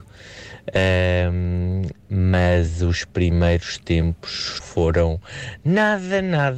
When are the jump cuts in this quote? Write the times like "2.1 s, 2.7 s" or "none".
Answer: 4.6 s